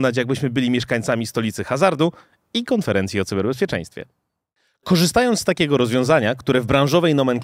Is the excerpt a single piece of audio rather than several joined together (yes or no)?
yes